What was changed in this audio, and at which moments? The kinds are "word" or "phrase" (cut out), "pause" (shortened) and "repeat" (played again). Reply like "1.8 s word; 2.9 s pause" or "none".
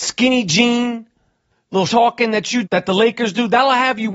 1.9 s word; 2.6 s word